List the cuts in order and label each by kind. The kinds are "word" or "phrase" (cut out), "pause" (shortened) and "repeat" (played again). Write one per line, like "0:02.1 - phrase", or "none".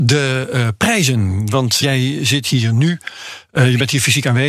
0:01.8 - word